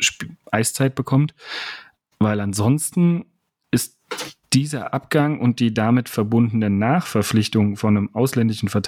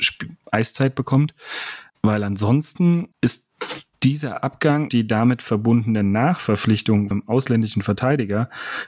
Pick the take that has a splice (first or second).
second